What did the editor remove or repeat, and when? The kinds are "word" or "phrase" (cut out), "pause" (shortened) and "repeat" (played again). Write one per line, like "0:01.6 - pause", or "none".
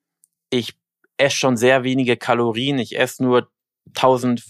none